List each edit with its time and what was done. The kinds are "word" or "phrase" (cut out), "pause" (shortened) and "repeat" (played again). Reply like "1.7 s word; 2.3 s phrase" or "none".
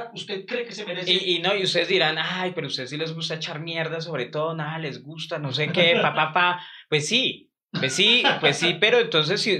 none